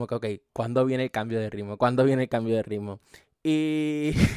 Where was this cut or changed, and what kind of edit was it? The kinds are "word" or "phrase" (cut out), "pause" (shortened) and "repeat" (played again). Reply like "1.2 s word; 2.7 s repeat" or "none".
none